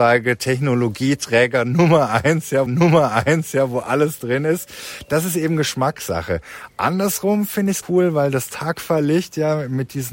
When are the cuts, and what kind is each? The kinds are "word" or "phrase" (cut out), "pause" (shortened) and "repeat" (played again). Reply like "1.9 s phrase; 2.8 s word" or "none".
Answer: 2.7 s repeat; 7.8 s word